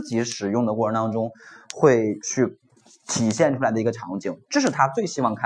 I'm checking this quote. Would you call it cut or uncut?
uncut